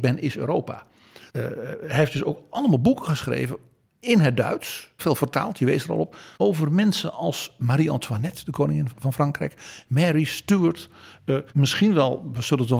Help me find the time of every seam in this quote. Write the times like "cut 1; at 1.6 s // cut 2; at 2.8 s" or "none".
cut 1; at 1.3 s // cut 2; at 3.8 s // cut 3; at 5.0 s // cut 4; at 6.3 s // cut 5; at 8.9 s // cut 6; at 11.5 s